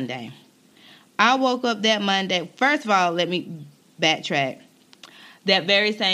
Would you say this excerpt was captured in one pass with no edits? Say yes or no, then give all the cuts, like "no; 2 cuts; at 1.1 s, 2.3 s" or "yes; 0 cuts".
yes; 0 cuts